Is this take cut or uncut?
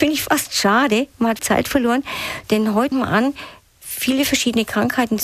cut